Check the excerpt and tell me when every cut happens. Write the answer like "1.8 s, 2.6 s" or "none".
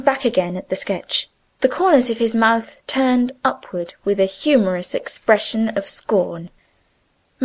1.4 s